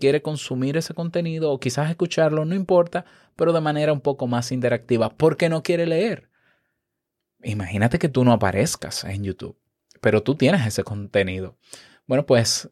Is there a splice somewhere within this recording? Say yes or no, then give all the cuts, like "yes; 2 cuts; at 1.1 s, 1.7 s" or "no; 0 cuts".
no; 0 cuts